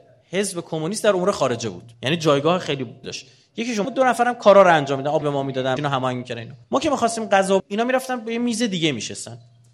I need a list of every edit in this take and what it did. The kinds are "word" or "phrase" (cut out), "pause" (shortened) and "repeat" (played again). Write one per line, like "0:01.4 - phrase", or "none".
0:01.9 - pause
0:03.0 - word
0:03.8 - word
0:05.2 - word
0:05.8 - word
0:06.6 - pause
0:07.6 - word

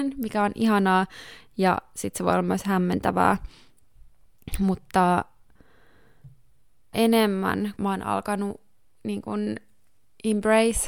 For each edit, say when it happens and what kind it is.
0:06.9 - word
0:07.8 - word

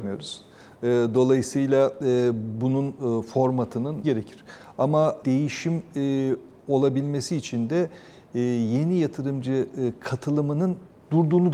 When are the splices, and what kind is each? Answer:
0:04.0 - phrase
0:05.2 - word

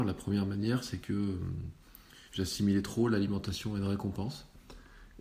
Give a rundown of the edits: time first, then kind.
0:02.3 - pause

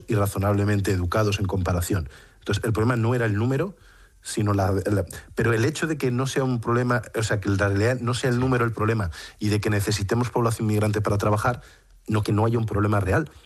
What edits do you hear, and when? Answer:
0:12.2 - word

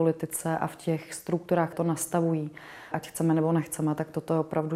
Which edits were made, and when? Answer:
0:01.7 - word
0:02.9 - word

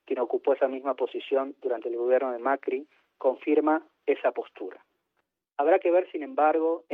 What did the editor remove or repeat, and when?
none

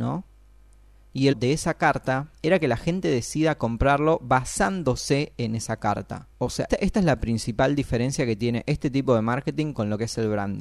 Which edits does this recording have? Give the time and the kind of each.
0:01.3 - word
0:02.4 - pause
0:06.3 - pause
0:06.7 - word

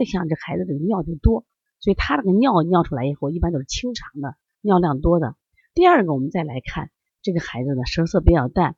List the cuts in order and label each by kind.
none

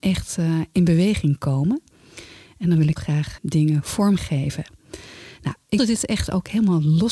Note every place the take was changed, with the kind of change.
0:03.0 - word
0:03.4 - word
0:04.2 - word
0:05.8 - word

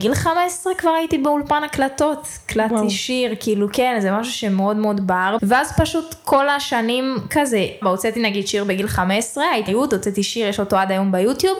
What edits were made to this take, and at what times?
0:05.4 - word
0:07.8 - word
0:09.7 - word

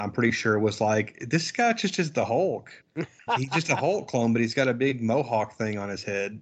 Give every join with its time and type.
0:03.3 - word

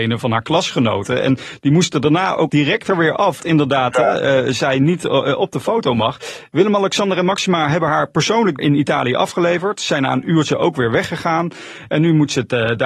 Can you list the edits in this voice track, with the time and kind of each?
0:02.5 - word
0:03.4 - word
0:08.6 - word

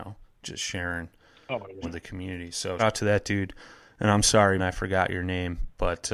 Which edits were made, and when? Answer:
0:01.8 - word
0:02.8 - word
0:04.6 - word

